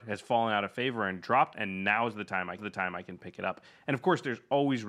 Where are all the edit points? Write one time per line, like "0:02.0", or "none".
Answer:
0:01.5
0:02.6

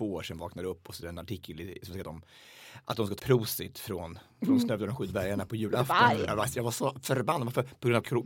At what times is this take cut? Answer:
0:01.0
0:02.0
0:03.2

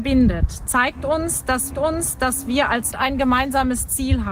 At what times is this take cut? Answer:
0:01.7
0:02.9

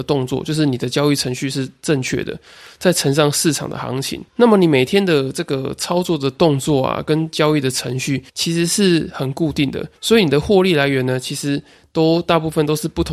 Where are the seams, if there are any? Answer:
0:04.3
0:08.3
0:10.0

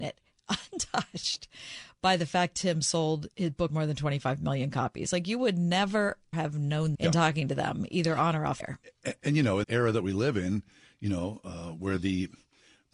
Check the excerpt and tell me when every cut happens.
0:02.5
0:03.7
0:06.3
0:06.9
0:08.6
0:09.6

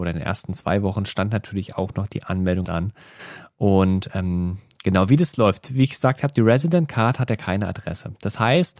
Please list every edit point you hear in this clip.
0:02.6

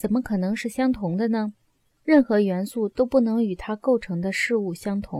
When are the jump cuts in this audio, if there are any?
none

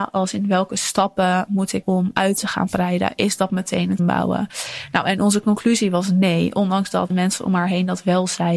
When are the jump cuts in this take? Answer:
0:01.8
0:04.0
0:07.1

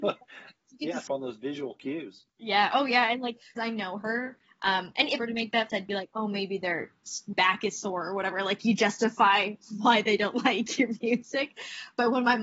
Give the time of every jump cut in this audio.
0:01.1
0:02.3
0:03.6
0:05.2
0:05.7

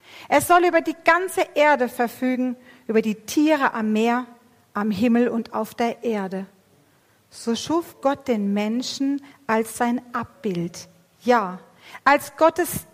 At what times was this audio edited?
none

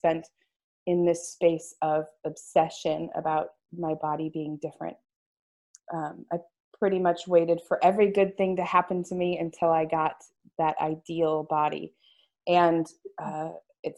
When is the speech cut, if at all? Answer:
none

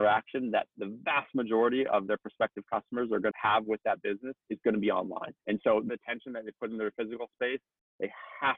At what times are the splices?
0:03.3
0:04.4
0:05.4
0:05.9

